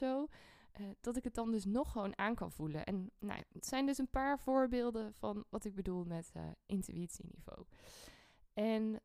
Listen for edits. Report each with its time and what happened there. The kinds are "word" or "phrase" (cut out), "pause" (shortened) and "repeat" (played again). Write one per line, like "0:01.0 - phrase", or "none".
0:03.6 - word